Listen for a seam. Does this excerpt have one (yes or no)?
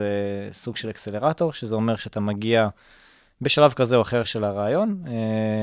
no